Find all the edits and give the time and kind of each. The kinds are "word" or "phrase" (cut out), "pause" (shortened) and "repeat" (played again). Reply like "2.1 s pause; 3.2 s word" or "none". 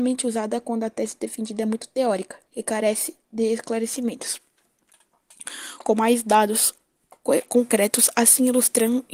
2.5 s pause; 3.2 s pause